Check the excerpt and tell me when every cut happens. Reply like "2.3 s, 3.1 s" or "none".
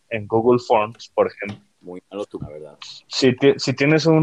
1.7 s, 2.4 s